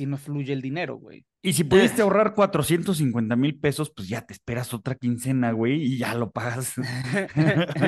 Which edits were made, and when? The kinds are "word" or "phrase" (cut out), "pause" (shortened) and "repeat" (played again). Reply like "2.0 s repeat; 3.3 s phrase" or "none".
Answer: 1.3 s pause